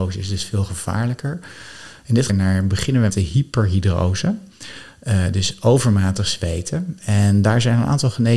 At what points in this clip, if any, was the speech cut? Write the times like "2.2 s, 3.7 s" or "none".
2.3 s, 3.1 s